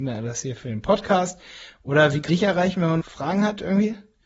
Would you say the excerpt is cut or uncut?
cut